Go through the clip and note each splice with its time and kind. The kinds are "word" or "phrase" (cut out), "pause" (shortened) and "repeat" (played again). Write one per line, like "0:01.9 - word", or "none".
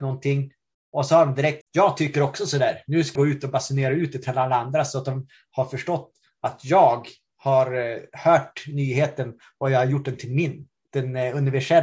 0:01.6 - word
0:03.1 - word